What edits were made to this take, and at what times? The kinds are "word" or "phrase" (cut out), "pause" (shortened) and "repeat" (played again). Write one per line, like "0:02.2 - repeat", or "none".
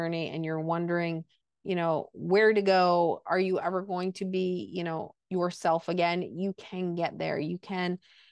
0:05.2 - pause